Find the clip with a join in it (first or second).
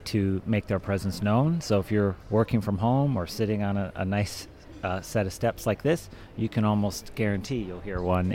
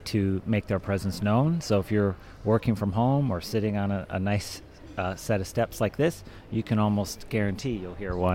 first